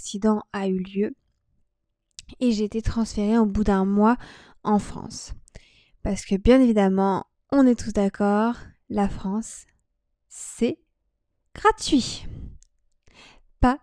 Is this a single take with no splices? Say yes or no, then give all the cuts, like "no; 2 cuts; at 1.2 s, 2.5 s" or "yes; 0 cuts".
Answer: yes; 0 cuts